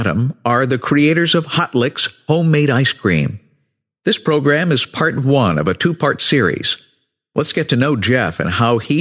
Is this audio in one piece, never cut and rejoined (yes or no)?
yes